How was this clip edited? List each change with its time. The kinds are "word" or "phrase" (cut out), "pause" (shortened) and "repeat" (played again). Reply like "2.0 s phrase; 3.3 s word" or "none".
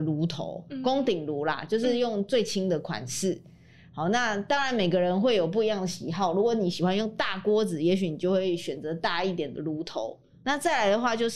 none